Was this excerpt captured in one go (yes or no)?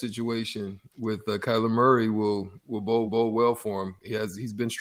no